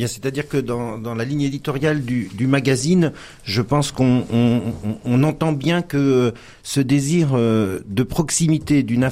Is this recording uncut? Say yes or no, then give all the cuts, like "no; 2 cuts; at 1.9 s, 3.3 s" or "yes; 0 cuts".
yes; 0 cuts